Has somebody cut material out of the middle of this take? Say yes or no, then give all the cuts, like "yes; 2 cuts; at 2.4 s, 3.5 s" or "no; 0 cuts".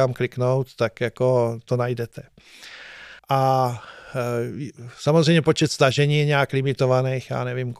yes; 1 cut; at 3.2 s